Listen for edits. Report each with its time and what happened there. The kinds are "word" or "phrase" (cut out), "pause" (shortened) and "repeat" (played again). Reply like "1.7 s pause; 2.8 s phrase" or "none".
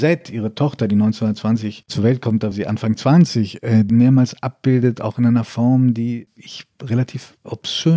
2.5 s word; 3.9 s word